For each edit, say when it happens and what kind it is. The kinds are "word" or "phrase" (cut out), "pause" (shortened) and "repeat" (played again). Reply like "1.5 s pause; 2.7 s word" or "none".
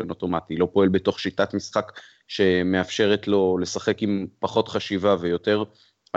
none